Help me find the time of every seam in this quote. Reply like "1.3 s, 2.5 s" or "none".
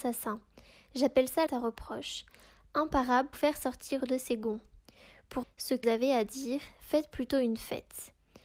1.5 s, 3.3 s, 4.0 s, 5.4 s, 5.8 s